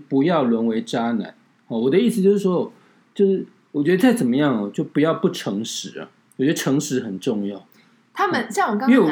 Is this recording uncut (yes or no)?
yes